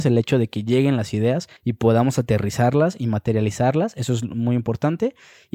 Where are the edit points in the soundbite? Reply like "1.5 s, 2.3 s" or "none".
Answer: 1.6 s